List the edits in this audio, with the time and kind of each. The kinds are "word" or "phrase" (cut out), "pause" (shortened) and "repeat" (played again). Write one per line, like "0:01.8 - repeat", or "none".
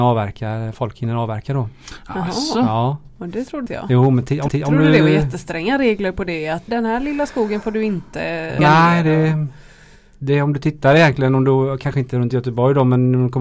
0:03.7 - word
0:04.5 - repeat
0:06.7 - word
0:08.6 - word